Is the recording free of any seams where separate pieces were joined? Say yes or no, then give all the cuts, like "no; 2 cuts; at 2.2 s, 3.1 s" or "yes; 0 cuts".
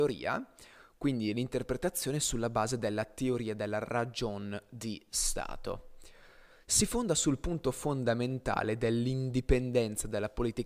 yes; 0 cuts